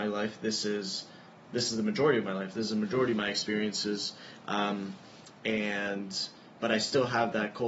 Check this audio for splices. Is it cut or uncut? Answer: uncut